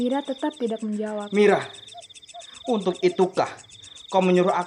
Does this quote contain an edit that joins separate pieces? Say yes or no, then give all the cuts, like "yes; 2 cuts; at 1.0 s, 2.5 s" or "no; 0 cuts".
no; 0 cuts